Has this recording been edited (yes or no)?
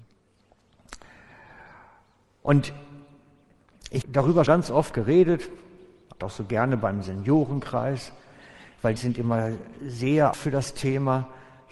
yes